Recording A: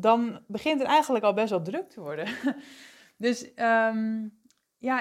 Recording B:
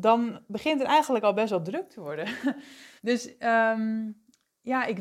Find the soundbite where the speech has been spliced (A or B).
B